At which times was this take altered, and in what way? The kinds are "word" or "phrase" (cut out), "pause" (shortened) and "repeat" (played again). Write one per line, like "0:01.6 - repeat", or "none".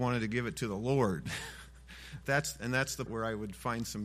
0:02.2 - word
0:03.1 - word